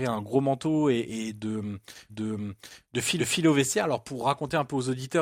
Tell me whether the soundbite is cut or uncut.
cut